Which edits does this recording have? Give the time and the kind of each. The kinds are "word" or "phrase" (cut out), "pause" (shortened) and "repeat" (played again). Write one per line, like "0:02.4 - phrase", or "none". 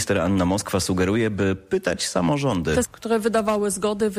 0:02.8 - word